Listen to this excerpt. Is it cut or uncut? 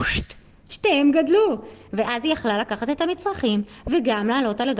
uncut